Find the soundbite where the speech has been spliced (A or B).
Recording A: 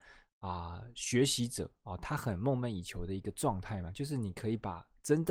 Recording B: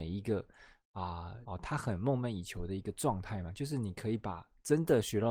B